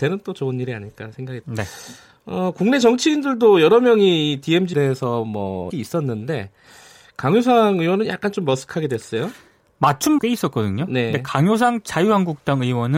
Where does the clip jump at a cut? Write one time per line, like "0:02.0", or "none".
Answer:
0:01.4
0:04.7
0:05.7
0:10.2